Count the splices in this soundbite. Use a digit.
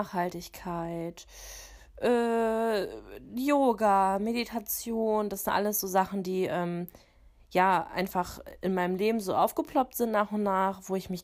0